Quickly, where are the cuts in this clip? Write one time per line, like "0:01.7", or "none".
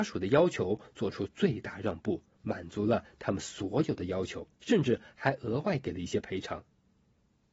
0:04.5